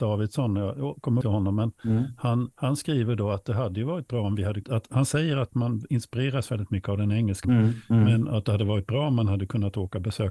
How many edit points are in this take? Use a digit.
4